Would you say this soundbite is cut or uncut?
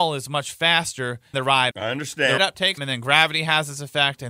cut